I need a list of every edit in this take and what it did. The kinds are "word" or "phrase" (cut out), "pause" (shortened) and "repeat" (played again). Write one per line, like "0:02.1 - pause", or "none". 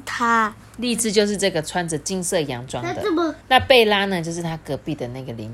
0:03.4 - pause